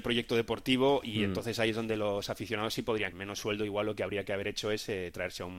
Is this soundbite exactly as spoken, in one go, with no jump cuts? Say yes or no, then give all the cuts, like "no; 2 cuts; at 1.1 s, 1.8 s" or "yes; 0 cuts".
no; 1 cut; at 3.1 s